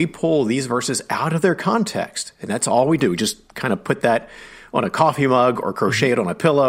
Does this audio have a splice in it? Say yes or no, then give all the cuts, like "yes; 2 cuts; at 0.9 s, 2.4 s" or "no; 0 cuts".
no; 0 cuts